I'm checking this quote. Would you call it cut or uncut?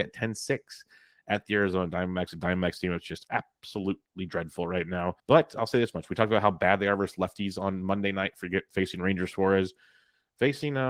cut